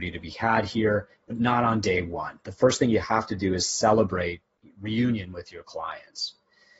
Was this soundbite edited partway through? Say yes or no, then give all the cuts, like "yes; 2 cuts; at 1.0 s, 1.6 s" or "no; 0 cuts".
no; 0 cuts